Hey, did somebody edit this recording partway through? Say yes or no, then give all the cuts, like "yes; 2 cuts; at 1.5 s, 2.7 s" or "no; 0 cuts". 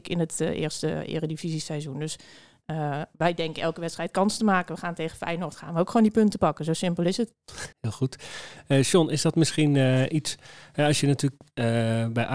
yes; 1 cut; at 7.7 s